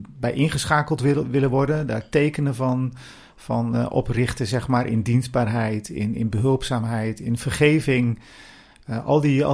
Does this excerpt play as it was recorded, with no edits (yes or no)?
yes